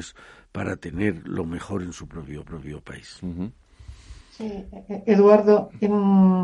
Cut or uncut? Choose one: cut